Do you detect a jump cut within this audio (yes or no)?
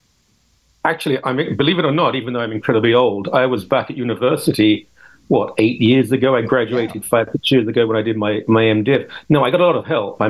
no